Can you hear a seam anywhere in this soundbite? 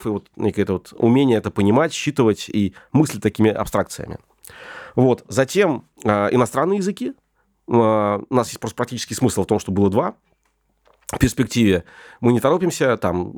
yes; 1 cut; at 5.9 s

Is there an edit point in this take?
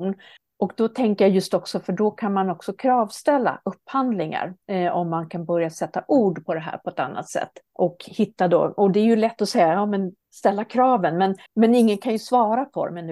yes; 3 cuts; at 4.6 s, 7.7 s, 11.5 s

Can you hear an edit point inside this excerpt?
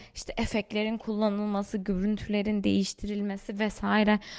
no; 0 cuts

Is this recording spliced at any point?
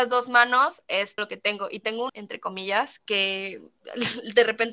yes; 3 cuts; at 1.2 s, 2.1 s, 3.0 s

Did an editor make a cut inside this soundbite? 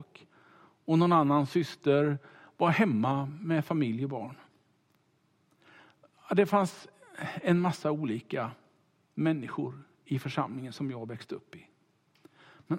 no; 0 cuts

